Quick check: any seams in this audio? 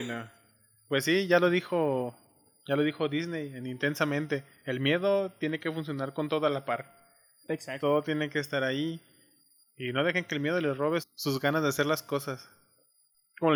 yes; 1 cut; at 11.0 s

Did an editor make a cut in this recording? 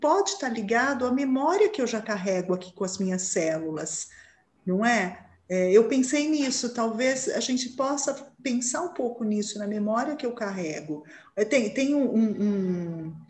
no; 0 cuts

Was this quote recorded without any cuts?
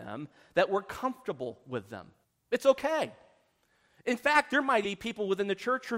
no; 2 cuts; at 2.2 s, 4.8 s

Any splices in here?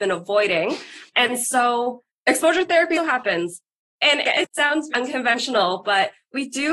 yes; 4 cuts; at 2.1 s, 2.9 s, 4.2 s, 4.9 s

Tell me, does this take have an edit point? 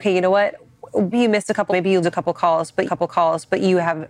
yes; 4 cuts; at 1.1 s, 1.7 s, 2.0 s, 2.9 s

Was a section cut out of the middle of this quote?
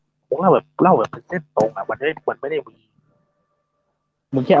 no; 0 cuts

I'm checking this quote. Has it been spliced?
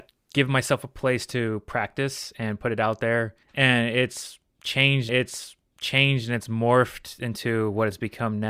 yes; 2 cuts; at 3.4 s, 5.1 s

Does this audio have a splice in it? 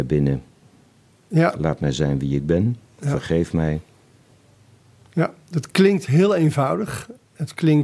no; 0 cuts

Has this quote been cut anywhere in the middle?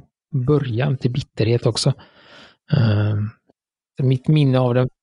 no; 0 cuts

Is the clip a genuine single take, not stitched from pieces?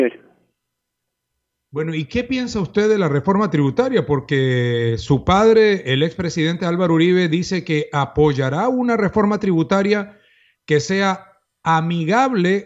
yes; 0 cuts

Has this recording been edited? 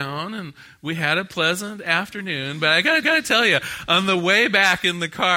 yes; 1 cut; at 3.0 s

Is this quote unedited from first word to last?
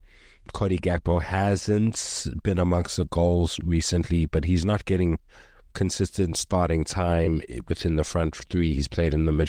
yes; 0 cuts

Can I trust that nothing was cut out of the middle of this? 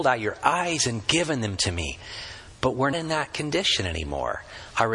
no; 1 cut; at 2.9 s

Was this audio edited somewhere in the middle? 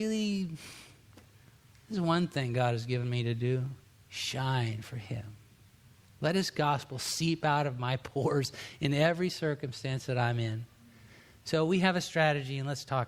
no; 0 cuts

